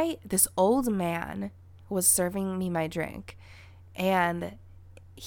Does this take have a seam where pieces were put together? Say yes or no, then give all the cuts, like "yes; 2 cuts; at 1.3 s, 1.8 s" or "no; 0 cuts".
no; 0 cuts